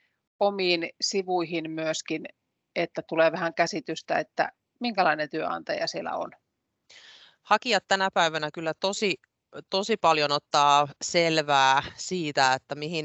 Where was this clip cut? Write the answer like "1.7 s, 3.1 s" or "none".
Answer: none